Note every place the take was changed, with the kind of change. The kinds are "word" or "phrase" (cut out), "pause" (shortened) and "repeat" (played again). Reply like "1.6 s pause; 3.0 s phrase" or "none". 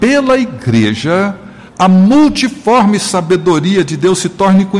1.7 s pause